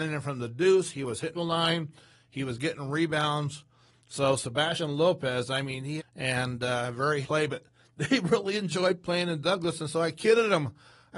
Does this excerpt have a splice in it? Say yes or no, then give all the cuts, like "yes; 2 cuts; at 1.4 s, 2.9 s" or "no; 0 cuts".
yes; 3 cuts; at 1.3 s, 6.0 s, 7.2 s